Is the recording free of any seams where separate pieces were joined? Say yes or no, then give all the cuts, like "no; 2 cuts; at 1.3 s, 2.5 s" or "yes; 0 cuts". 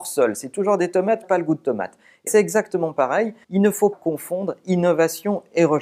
no; 4 cuts; at 1.2 s, 2.3 s, 3.4 s, 3.9 s